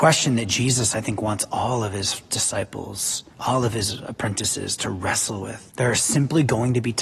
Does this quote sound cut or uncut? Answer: cut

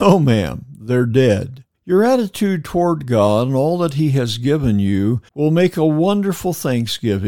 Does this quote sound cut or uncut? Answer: cut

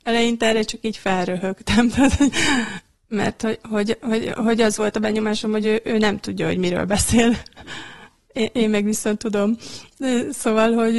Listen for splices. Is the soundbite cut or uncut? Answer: uncut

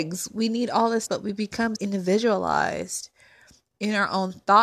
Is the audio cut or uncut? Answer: cut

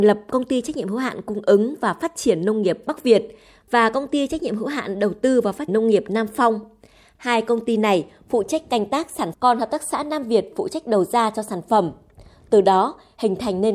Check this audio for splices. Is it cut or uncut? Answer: cut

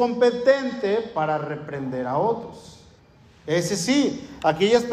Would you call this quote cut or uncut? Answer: cut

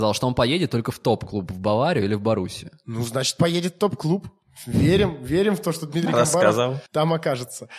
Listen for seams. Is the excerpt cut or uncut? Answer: cut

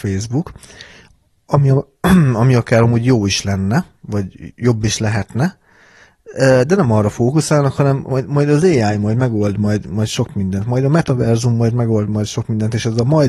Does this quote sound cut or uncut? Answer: uncut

